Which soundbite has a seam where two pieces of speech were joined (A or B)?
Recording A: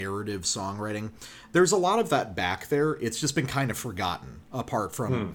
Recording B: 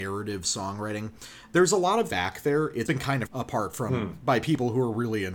B